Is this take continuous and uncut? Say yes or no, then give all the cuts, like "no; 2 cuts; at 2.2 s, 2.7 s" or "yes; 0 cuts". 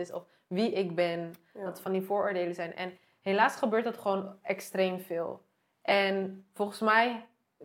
yes; 0 cuts